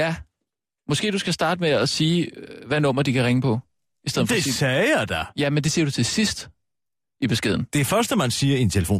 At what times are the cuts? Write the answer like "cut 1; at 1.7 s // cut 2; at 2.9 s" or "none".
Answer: none